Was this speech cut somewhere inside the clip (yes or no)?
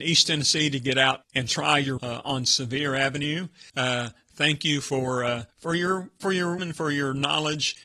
yes